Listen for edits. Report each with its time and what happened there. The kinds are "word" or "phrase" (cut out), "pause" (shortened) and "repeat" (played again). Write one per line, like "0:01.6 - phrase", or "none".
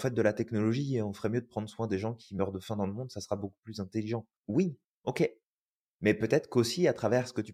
0:04.4 - pause